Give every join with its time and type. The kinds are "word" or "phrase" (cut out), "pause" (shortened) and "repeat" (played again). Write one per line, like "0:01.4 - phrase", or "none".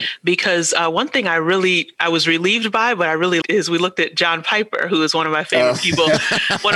0:03.4 - word